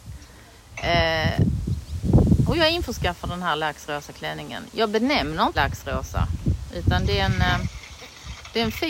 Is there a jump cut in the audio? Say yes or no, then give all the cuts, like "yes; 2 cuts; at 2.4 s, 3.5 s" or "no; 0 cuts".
yes; 1 cut; at 5.5 s